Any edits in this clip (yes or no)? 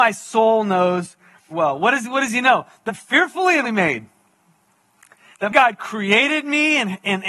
yes